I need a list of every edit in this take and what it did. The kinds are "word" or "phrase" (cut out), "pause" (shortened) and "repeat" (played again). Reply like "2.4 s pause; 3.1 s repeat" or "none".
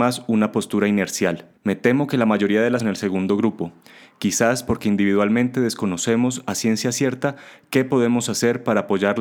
1.6 s pause; 2.8 s phrase